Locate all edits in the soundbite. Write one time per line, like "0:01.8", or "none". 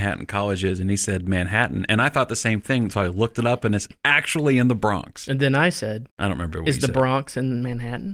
0:06.1